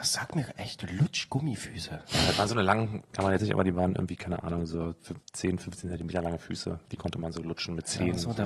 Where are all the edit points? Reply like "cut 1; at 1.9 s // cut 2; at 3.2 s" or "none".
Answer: cut 1; at 3.0 s // cut 2; at 3.4 s // cut 3; at 5.2 s